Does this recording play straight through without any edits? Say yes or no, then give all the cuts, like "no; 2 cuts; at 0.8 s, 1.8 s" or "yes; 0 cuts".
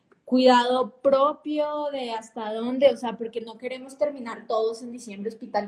yes; 0 cuts